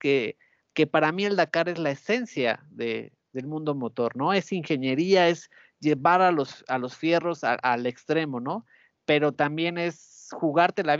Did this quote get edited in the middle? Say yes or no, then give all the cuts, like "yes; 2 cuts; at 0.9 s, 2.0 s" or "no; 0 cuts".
no; 0 cuts